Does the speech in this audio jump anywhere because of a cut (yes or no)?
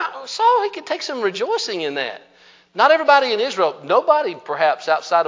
no